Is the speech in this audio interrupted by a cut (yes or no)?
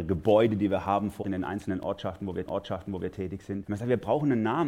yes